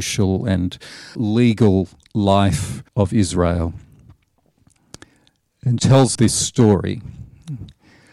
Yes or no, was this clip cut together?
yes